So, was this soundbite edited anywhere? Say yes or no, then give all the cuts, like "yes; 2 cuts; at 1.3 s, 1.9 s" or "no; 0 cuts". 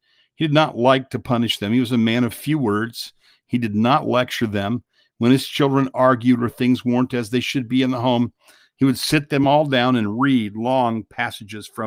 no; 0 cuts